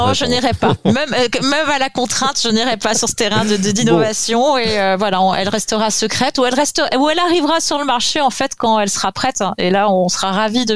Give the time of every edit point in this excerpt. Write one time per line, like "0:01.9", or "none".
none